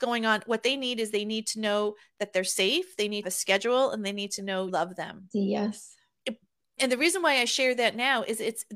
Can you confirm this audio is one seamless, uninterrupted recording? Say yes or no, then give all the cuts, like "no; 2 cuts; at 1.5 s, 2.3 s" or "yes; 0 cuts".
no; 4 cuts; at 3.2 s, 4.7 s, 5.3 s, 6.8 s